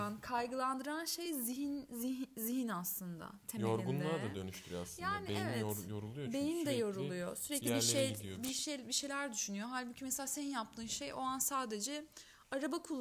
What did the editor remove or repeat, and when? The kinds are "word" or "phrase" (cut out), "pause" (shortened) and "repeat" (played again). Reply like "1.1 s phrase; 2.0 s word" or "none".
none